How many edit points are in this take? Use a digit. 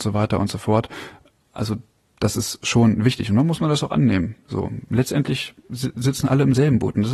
0